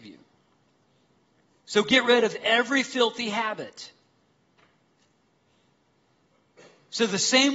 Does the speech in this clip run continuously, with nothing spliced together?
yes; 0 cuts

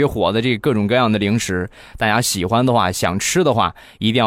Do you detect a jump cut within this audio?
no; 0 cuts

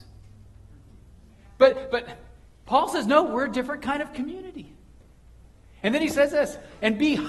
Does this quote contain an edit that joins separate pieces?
no; 0 cuts

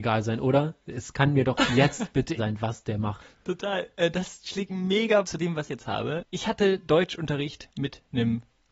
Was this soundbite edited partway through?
yes; 4 cuts; at 2.4 s, 4.7 s, 5.2 s, 5.7 s

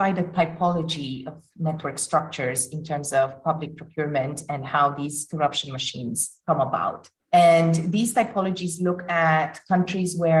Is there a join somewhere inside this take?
yes; 1 cut; at 7.2 s

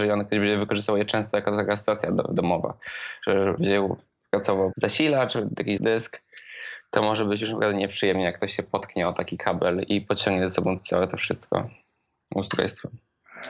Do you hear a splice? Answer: yes; 4 cuts; at 3.6 s, 4.7 s, 5.8 s, 10.8 s

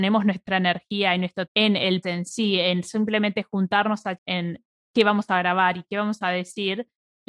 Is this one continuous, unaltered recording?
no; 3 cuts; at 1.5 s, 2.0 s, 4.2 s

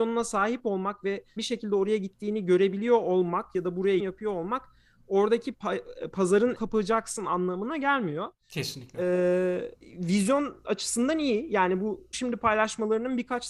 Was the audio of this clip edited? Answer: yes; 6 cuts; at 1.4 s, 4.0 s, 5.5 s, 6.5 s, 9.8 s, 12.1 s

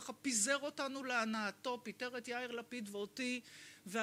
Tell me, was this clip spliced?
no; 0 cuts

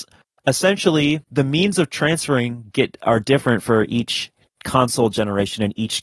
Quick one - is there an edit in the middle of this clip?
yes; 1 cut; at 1.2 s

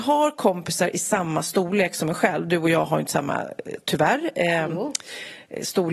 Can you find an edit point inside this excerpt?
no; 0 cuts

